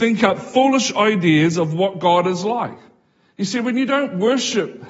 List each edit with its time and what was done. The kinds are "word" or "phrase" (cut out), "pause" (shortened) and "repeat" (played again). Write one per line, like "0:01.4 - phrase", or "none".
none